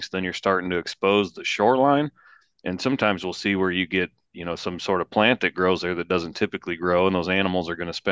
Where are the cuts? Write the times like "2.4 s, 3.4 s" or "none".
none

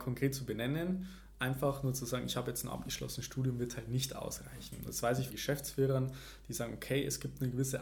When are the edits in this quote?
5.3 s

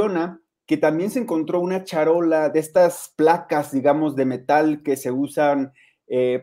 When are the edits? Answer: none

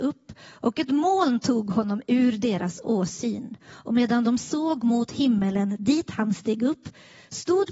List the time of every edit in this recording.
3.6 s

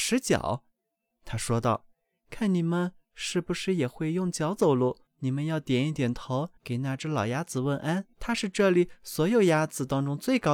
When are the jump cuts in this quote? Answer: 5.1 s, 6.6 s, 8.1 s

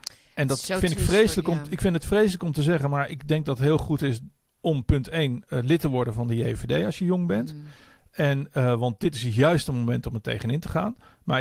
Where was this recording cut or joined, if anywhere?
none

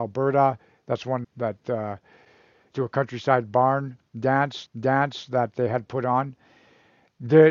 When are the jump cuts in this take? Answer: 1.2 s, 2.7 s, 4.7 s

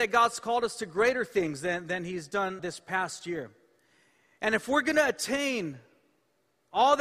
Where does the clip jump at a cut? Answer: 2.6 s

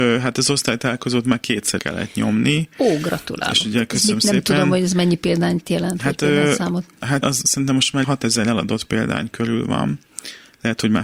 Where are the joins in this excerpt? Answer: 1.8 s, 7.2 s, 8.0 s

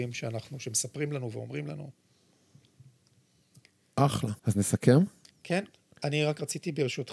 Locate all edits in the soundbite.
4.4 s, 5.3 s

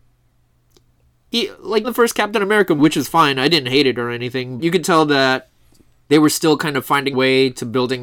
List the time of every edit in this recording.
1.8 s, 2.8 s, 4.6 s, 6.1 s, 7.1 s

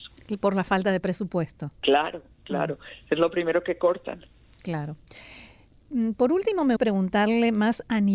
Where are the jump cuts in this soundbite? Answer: 1.7 s, 6.8 s

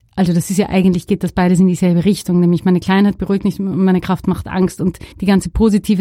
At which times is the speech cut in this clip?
5.1 s

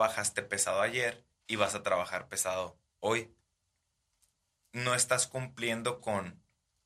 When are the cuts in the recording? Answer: 2.9 s

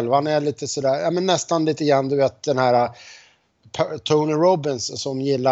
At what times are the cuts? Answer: none

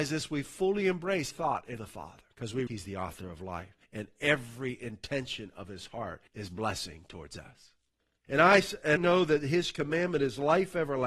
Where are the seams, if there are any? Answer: 1.3 s, 1.8 s, 2.3 s, 2.7 s, 3.8 s, 6.3 s, 8.2 s, 9.0 s

